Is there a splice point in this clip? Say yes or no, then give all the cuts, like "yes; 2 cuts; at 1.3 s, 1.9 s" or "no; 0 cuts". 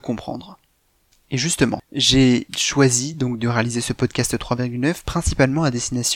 no; 0 cuts